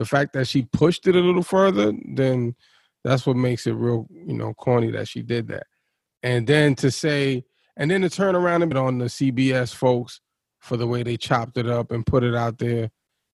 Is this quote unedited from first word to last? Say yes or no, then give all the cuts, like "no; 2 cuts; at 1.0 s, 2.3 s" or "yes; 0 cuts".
no; 1 cut; at 8.7 s